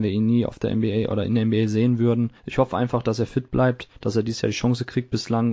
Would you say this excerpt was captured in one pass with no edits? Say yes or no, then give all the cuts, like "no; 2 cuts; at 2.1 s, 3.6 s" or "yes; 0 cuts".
yes; 0 cuts